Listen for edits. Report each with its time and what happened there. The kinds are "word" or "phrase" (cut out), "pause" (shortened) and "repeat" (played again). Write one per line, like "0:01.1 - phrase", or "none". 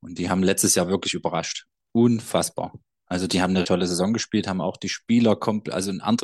0:03.6 - word